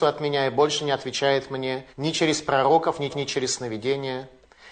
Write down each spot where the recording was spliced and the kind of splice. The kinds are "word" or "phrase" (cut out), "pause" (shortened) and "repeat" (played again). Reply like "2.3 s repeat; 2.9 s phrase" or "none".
1.9 s pause; 3.1 s repeat